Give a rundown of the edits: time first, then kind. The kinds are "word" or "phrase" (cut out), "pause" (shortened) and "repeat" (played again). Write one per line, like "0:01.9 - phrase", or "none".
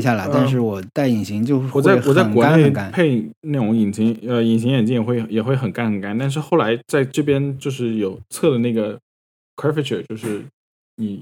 none